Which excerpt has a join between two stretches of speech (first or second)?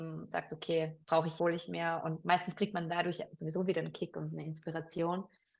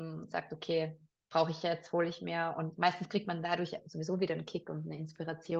first